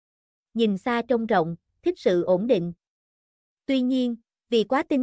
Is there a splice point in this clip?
no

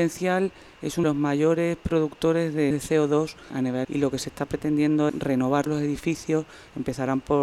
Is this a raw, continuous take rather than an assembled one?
no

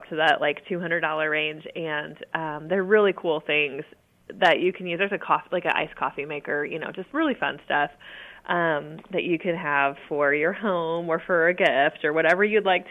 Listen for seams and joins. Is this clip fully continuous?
yes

